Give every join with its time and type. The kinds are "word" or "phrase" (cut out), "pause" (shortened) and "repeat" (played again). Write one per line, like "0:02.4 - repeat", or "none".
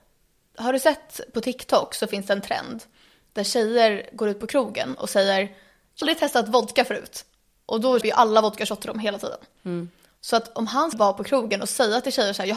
0:06.0 - word
0:08.0 - word
0:10.9 - word